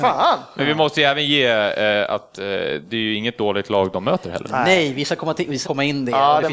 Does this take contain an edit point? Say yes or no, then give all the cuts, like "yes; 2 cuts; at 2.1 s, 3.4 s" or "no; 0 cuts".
yes; 1 cut; at 5.6 s